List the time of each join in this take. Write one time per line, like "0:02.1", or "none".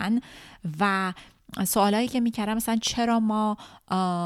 none